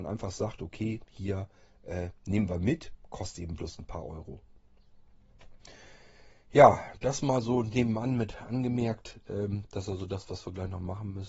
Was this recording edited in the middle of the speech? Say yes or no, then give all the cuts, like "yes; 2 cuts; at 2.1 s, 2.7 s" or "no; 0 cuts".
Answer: no; 0 cuts